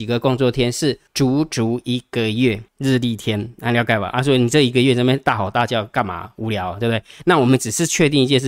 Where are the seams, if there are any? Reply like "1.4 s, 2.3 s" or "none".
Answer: 1.1 s, 2.7 s